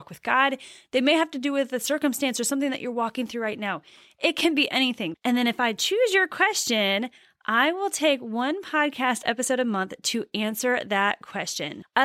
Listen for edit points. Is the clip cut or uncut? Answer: uncut